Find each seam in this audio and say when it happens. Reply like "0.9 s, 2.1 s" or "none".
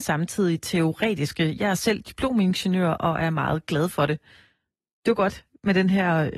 none